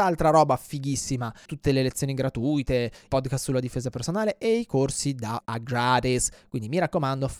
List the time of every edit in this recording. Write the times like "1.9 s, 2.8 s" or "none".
1.5 s, 3.1 s, 5.4 s